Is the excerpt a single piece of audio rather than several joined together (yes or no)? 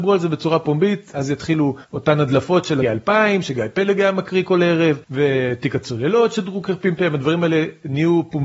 no